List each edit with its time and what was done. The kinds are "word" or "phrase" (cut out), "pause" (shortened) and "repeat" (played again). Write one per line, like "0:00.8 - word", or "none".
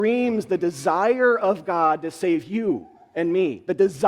none